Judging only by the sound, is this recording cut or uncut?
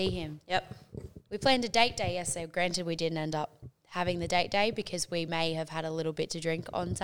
uncut